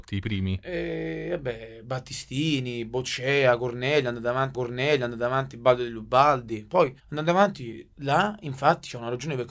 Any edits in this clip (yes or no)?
yes